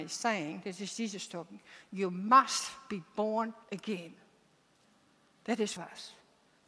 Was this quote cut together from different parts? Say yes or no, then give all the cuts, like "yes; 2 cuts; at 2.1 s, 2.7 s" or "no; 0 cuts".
yes; 2 cuts; at 3.6 s, 5.8 s